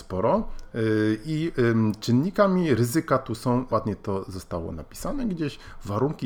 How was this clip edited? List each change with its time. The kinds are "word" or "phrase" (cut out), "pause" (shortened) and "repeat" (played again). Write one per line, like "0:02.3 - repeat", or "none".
0:03.7 - word